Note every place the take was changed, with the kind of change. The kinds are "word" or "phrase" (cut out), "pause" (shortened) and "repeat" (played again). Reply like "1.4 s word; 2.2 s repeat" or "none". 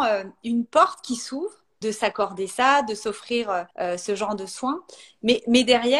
1.8 s word; 3.7 s pause